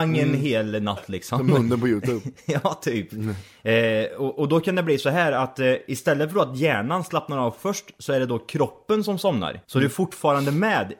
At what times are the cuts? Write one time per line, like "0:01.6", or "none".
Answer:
0:09.6